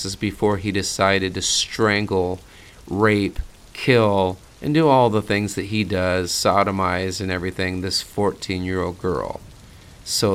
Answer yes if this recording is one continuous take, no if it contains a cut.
yes